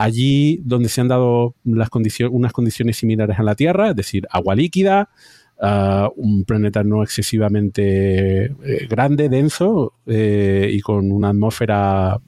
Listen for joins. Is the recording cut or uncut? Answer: uncut